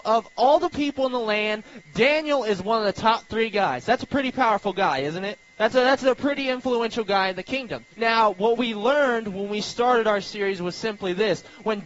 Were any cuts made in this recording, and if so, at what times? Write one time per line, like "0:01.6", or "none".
0:05.5
0:07.9